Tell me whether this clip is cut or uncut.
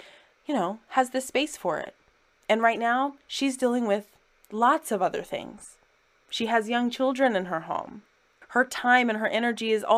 uncut